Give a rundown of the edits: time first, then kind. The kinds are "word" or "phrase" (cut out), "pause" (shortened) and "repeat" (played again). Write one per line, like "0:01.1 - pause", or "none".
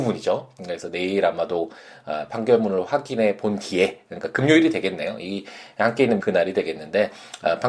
0:06.2 - phrase